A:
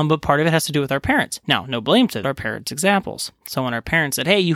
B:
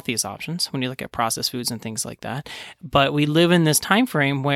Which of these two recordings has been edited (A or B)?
A